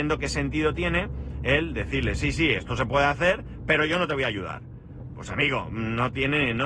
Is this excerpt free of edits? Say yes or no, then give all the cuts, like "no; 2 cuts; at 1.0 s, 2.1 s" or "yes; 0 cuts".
yes; 0 cuts